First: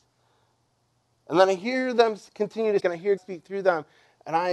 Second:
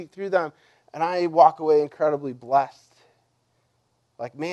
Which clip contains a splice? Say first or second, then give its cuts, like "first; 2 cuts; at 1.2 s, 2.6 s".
first; 2 cuts; at 2.8 s, 3.2 s